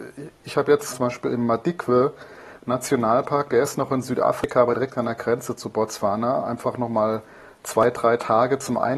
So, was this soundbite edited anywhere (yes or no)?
yes